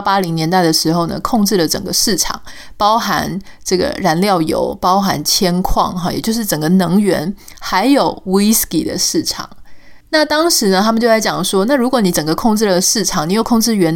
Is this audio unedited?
no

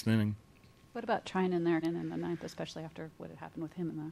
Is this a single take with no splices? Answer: no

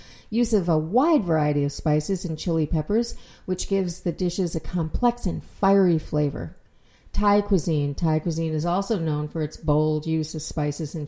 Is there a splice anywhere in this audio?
no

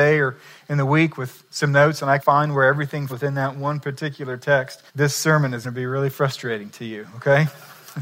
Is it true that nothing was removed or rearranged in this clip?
no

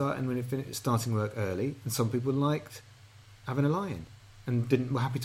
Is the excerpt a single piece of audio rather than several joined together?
yes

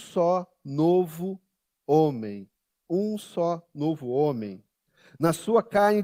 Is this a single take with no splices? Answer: yes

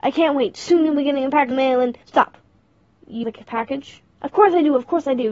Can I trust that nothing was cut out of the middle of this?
no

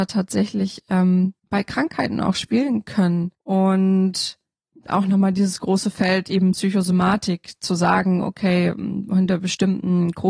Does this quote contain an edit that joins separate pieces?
yes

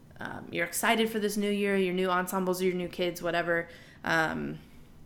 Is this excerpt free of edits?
yes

